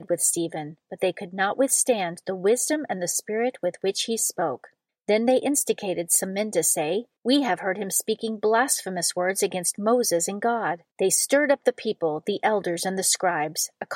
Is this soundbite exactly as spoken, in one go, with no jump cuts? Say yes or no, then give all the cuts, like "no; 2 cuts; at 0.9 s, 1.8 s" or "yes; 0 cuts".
no; 3 cuts; at 4.9 s, 7.2 s, 10.9 s